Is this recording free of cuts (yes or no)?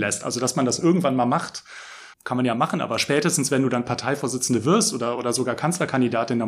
no